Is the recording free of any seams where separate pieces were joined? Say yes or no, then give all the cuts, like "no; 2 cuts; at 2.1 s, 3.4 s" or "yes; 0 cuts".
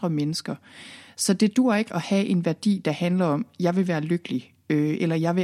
no; 1 cut; at 1.9 s